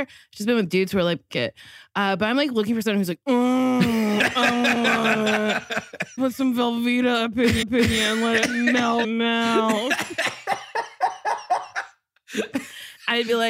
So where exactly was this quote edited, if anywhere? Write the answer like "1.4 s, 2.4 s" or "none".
1.3 s, 6.2 s, 7.6 s, 9.0 s